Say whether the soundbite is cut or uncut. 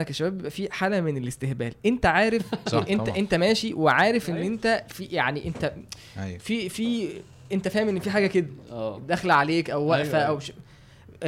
uncut